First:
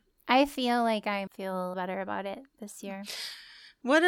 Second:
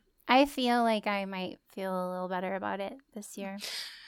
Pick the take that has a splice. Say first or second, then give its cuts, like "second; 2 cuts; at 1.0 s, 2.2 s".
first; 2 cuts; at 1.3 s, 1.7 s